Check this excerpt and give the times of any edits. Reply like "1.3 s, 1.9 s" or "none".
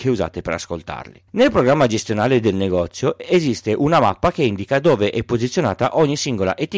1.3 s